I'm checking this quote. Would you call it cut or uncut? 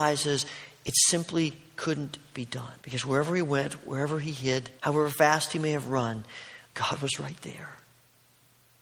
cut